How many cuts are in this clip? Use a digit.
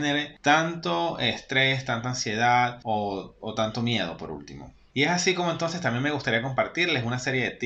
0